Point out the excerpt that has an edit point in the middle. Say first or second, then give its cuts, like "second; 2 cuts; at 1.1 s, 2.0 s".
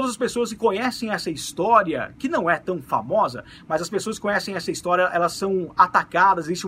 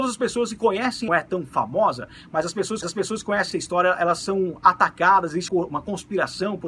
second; 4 cuts; at 1.1 s, 2.8 s, 3.5 s, 5.5 s